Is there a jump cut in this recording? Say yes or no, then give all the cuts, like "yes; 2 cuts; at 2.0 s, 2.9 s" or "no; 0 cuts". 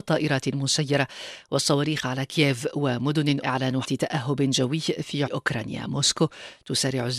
yes; 3 cuts; at 3.4 s, 3.8 s, 5.3 s